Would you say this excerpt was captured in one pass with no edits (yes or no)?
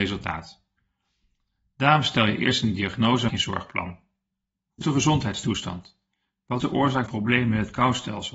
no